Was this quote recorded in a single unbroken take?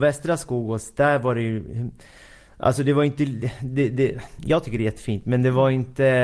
yes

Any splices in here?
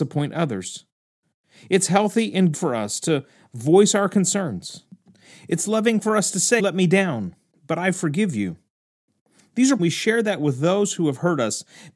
yes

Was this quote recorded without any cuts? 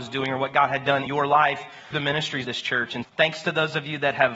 no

